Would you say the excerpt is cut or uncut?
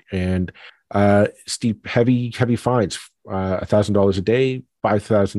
uncut